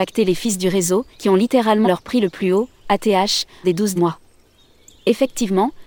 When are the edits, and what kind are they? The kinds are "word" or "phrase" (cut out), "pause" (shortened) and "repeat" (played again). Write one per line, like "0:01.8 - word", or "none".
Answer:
0:01.1 - pause
0:01.8 - word
0:03.6 - word
0:04.0 - word